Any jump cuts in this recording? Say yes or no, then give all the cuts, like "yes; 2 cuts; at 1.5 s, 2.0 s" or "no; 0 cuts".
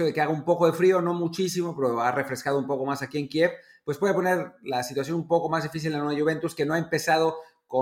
no; 0 cuts